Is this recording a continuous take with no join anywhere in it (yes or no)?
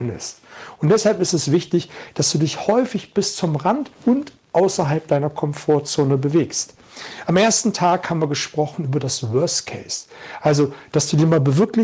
no